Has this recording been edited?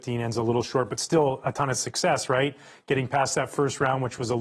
no; 0 cuts

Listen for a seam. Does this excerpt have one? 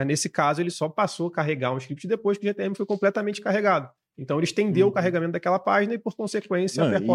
no; 0 cuts

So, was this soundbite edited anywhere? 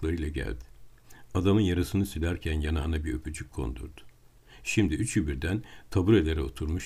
no; 0 cuts

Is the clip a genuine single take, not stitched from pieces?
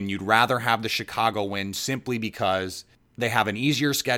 yes; 0 cuts

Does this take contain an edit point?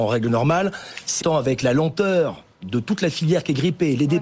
yes; 1 cut; at 1.2 s

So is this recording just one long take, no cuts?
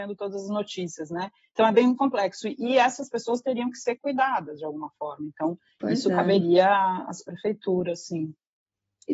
no; 1 cut; at 2.0 s

